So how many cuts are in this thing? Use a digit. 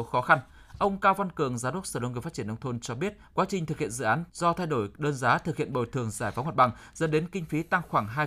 2